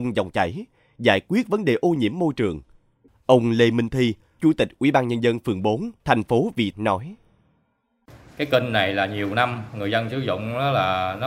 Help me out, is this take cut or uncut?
cut